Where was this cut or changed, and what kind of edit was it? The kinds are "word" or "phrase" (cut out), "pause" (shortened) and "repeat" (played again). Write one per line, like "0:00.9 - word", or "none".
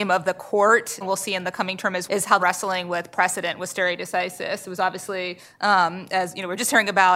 0:01.0 - word
0:02.1 - word
0:02.4 - phrase